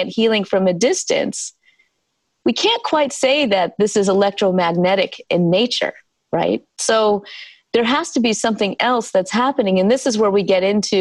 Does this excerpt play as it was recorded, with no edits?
yes; 0 cuts

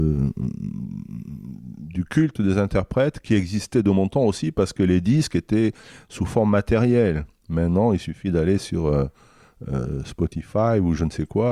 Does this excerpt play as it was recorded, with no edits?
yes; 0 cuts

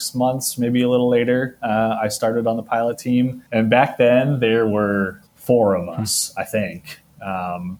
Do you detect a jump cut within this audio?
yes; 2 cuts; at 3.5 s, 5.3 s

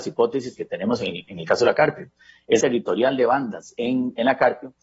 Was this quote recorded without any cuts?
no; 1 cut; at 2.6 s

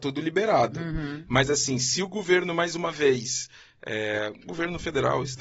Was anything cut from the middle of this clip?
no; 0 cuts

